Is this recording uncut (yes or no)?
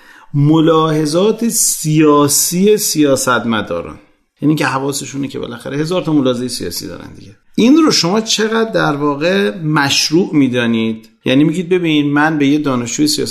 yes